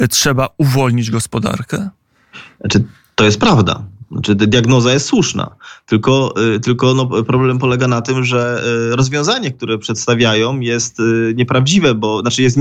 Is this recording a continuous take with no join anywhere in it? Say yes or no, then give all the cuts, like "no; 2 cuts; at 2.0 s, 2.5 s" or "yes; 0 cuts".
yes; 0 cuts